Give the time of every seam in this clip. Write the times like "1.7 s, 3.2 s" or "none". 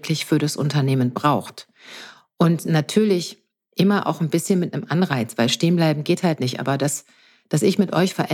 none